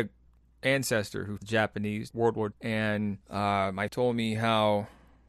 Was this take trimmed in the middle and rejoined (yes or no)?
yes